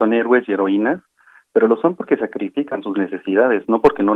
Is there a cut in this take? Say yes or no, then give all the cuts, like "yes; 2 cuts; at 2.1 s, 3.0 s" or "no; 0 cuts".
no; 0 cuts